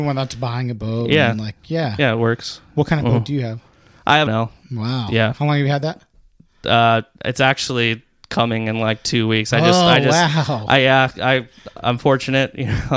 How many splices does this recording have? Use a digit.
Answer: 1